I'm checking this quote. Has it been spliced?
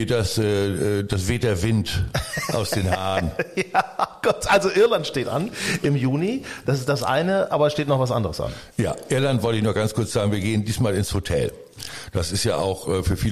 no; 0 cuts

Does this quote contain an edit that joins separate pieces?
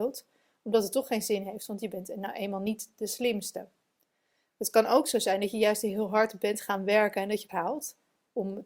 yes; 1 cut; at 7.5 s

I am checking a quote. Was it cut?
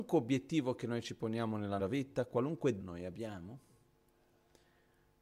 yes; 2 cuts; at 1.8 s, 2.8 s

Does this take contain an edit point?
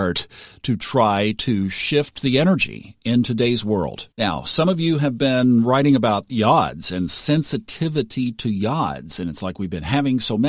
yes; 1 cut; at 4.1 s

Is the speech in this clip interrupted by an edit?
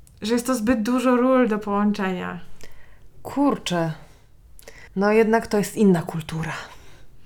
yes; 1 cut; at 4.9 s

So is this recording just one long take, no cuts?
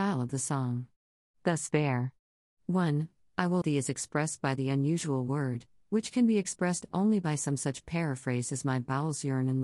no; 1 cut; at 3.6 s

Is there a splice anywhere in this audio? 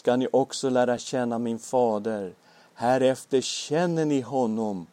no; 0 cuts

